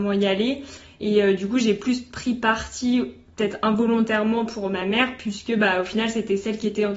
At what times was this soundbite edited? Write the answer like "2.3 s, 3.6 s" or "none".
none